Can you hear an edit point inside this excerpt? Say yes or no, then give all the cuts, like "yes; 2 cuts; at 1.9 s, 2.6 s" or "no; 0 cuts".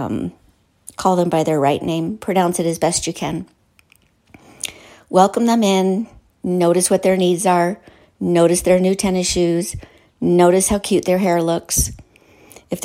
no; 0 cuts